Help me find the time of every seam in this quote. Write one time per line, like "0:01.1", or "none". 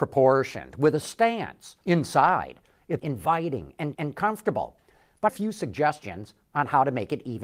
0:01.0
0:01.8
0:03.0
0:03.9
0:05.3